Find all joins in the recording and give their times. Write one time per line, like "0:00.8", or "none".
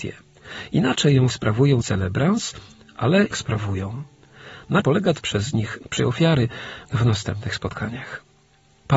0:01.3
0:01.8
0:03.3
0:04.8
0:05.2
0:06.0
0:06.8